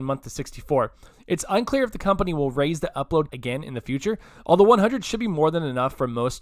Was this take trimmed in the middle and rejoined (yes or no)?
yes